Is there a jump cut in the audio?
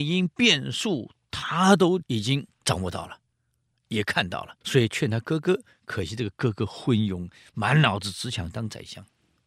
yes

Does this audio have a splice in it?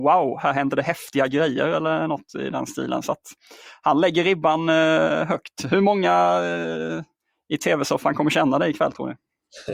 no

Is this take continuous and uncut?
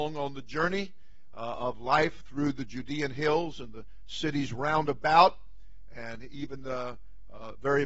yes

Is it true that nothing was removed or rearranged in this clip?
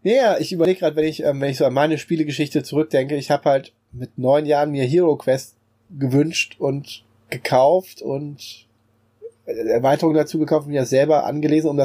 yes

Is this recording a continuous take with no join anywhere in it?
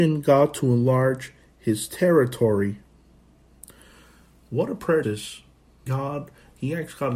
no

